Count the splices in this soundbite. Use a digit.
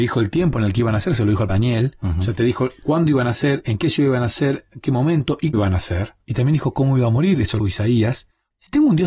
3